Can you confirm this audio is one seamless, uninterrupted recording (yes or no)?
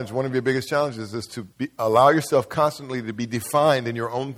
no